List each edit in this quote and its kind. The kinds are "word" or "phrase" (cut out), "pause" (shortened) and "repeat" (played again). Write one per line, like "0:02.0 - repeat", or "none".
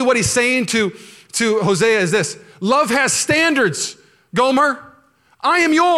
none